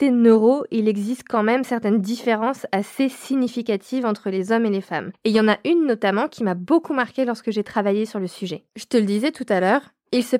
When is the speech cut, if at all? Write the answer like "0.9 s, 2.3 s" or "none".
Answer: 8.7 s